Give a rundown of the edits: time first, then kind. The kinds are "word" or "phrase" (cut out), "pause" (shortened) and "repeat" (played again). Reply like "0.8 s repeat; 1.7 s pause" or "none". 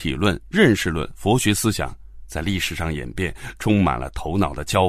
1.1 s phrase